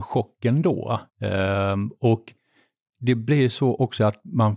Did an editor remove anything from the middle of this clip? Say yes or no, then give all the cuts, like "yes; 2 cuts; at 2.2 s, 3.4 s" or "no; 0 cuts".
yes; 1 cut; at 1.1 s